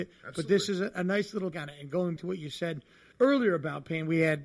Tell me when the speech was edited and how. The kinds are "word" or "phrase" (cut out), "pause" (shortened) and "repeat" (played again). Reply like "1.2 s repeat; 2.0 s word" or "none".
1.5 s word; 2.2 s word; 3.1 s word